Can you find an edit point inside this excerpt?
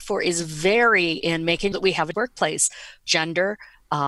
yes; 4 cuts; at 1.2 s, 1.7 s, 2.1 s, 3.0 s

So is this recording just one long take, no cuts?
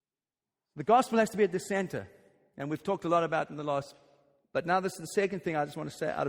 yes; 0 cuts

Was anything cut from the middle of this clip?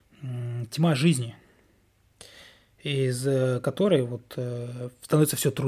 no; 0 cuts

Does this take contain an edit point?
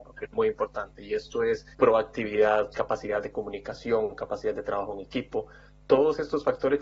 yes; 1 cut; at 1.7 s

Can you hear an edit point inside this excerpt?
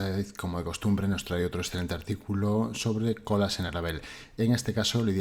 no; 0 cuts

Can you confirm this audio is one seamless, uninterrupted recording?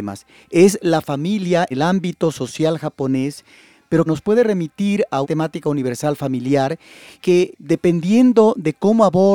no; 5 cuts; at 1.7 s, 4.1 s, 5.2 s, 7.2 s, 7.5 s

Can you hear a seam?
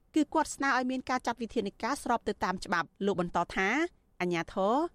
yes; 1 cut; at 2.9 s

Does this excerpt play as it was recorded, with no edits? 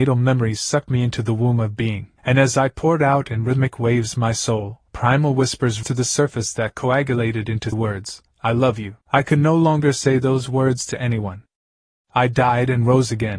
no; 6 cuts; at 2.2 s, 4.9 s, 5.8 s, 7.7 s, 8.3 s, 9.0 s

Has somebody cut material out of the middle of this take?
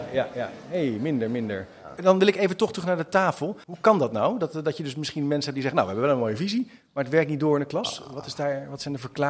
yes; 1 cut; at 3.6 s

